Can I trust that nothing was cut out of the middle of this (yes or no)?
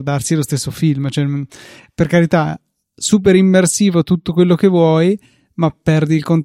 yes